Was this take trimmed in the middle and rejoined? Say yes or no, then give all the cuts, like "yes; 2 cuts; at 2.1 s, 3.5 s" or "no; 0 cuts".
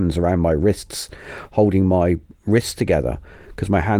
no; 0 cuts